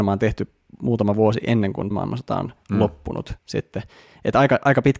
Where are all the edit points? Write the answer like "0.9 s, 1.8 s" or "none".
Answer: 1.9 s, 3.4 s